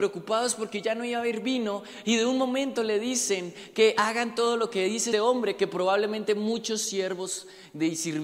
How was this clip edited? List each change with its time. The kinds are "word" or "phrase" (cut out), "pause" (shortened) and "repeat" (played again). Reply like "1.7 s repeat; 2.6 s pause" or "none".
5.1 s word